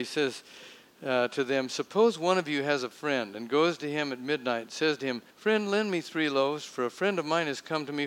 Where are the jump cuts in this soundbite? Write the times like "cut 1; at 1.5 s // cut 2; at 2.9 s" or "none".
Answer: cut 1; at 5.3 s